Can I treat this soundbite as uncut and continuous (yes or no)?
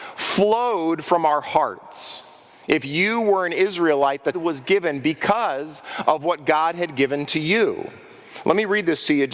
no